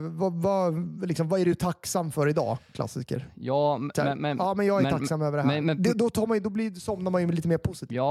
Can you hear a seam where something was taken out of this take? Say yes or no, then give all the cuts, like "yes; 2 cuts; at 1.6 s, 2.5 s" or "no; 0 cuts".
no; 0 cuts